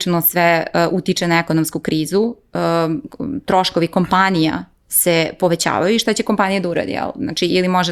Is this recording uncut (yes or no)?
yes